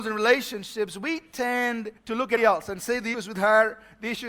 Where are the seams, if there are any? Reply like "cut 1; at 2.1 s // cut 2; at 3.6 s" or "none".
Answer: cut 1; at 2.0 s // cut 2; at 2.4 s // cut 3; at 3.1 s